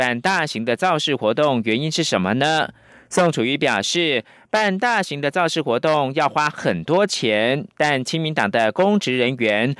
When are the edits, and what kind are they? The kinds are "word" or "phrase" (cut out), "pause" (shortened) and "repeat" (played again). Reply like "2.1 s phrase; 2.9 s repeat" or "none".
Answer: none